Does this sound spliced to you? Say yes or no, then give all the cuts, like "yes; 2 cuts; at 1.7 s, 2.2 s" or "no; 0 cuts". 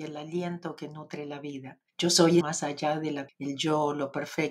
yes; 3 cuts; at 1.9 s, 2.4 s, 3.3 s